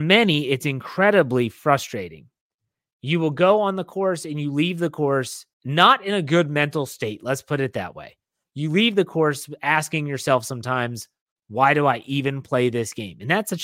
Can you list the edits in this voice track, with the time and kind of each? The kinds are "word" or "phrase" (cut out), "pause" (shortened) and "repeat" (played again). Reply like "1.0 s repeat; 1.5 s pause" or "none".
5.5 s pause